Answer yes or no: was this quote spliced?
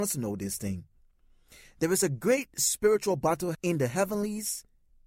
yes